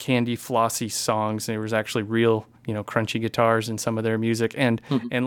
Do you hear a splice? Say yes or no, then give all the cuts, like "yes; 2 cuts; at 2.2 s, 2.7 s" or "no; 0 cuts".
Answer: yes; 1 cut; at 2.6 s